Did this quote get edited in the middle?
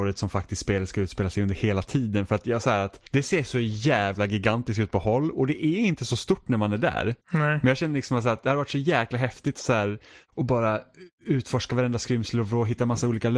yes; 2 cuts; at 3.1 s, 7.2 s

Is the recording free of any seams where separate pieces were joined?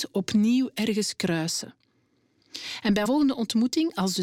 no; 1 cut; at 3.1 s

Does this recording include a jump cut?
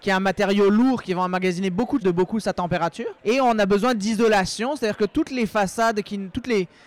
yes; 2 cuts; at 2.0 s, 3.2 s

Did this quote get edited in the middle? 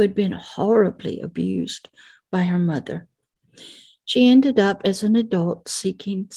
no; 0 cuts

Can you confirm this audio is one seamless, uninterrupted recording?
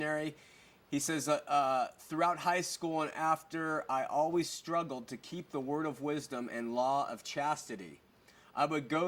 yes; 0 cuts

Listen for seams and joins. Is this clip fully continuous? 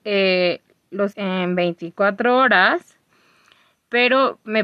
no; 1 cut; at 1.1 s

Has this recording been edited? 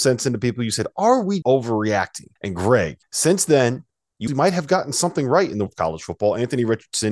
yes; 5 cuts; at 1.4 s, 2.4 s, 3.0 s, 4.3 s, 5.7 s

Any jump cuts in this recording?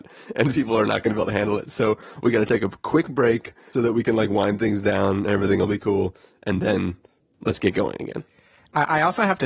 yes; 1 cut; at 3.7 s

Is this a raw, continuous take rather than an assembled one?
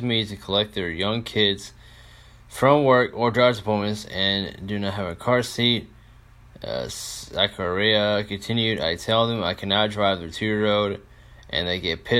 yes; 0 cuts

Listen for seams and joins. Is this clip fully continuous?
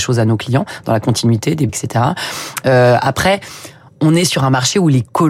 no; 1 cut; at 1.7 s

